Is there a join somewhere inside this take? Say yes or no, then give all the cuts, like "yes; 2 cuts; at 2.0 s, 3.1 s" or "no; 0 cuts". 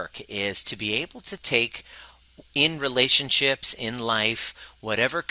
yes; 1 cut; at 2.5 s